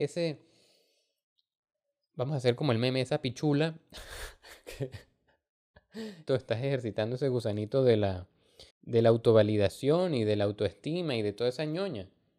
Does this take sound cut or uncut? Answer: cut